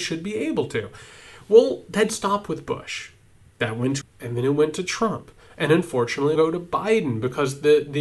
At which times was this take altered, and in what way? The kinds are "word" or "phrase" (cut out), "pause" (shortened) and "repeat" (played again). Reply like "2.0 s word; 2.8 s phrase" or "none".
2.1 s word; 4.0 s word; 6.4 s word

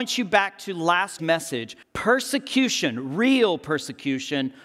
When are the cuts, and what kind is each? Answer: 1.2 s phrase; 1.8 s pause

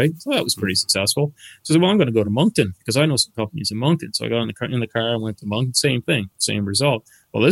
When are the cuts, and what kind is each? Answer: none

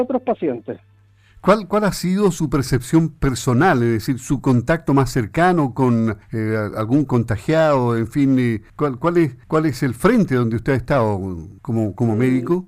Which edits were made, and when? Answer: 6.2 s pause; 8.7 s pause; 9.4 s pause; 11.6 s pause

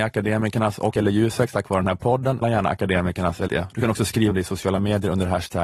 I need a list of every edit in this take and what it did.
0.9 s word; 2.4 s word; 3.5 s word; 4.3 s word

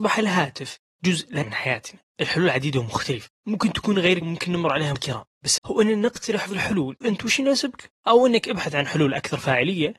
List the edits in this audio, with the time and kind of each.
1.4 s word; 2.1 s word; 3.4 s word; 4.2 s word; 4.9 s word; 5.6 s word; 6.5 s word; 7.0 s word; 7.9 s word

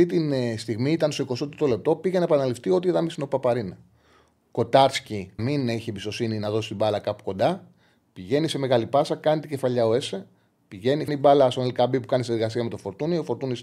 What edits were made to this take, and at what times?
5.4 s word; 11.1 s word

